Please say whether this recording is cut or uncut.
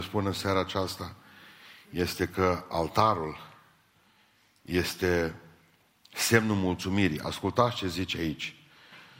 uncut